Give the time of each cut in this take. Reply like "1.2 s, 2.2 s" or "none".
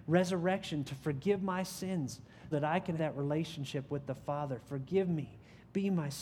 2.5 s, 3.0 s